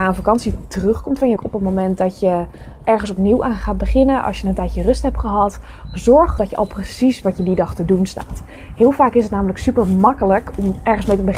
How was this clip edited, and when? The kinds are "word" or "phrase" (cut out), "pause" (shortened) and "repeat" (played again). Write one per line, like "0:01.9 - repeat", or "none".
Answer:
0:01.4 - word
0:02.8 - word
0:06.4 - word
0:07.2 - word